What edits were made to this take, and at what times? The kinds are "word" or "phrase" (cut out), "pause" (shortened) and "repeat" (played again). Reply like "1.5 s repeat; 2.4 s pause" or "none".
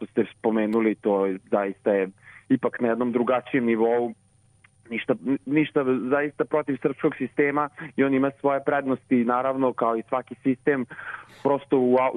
1.4 s pause